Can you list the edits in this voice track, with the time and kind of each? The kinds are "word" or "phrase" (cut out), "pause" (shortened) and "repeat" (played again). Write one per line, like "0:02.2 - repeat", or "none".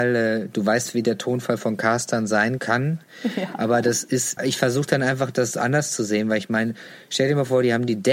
0:02.6 - word
0:04.4 - word

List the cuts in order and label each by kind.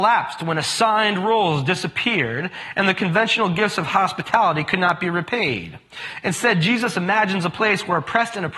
none

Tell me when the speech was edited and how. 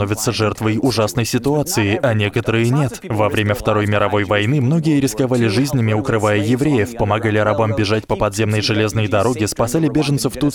none

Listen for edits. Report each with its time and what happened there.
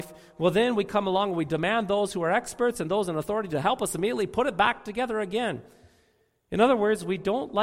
none

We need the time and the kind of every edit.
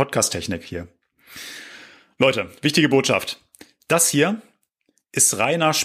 none

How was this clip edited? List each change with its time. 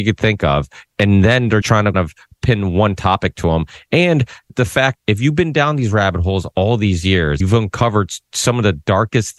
0:01.0 - word
0:01.6 - word
0:01.9 - word
0:04.5 - word
0:05.0 - word
0:07.4 - word

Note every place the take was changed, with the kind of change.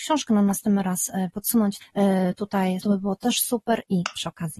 0:01.3 - word
0:01.8 - word
0:02.8 - word

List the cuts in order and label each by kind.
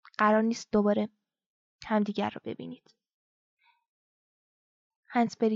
none

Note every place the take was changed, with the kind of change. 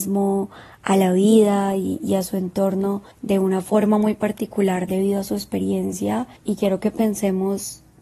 0:03.1 - pause
0:06.4 - pause

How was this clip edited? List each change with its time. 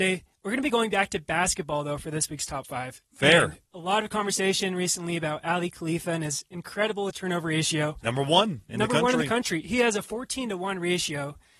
0:03.7 - pause
0:07.1 - word

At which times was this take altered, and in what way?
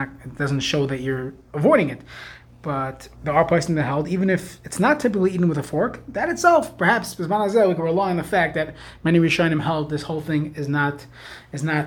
0:03.1 - pause

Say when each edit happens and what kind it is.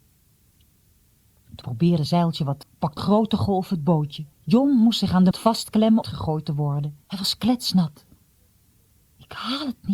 0:01.6 - word
0:02.1 - word
0:02.6 - word
0:03.0 - word
0:04.3 - pause
0:05.3 - word
0:06.0 - phrase
0:07.0 - pause

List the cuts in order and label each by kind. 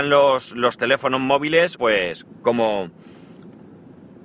0:01.7 - phrase

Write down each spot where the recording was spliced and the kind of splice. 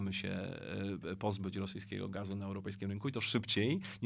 none

